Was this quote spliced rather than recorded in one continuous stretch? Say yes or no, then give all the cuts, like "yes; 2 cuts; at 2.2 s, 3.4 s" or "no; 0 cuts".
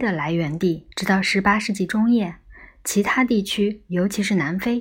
yes; 1 cut; at 0.9 s